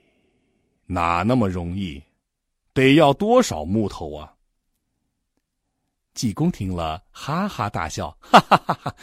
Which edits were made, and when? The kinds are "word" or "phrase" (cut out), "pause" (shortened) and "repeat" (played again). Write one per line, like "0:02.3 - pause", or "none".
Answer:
none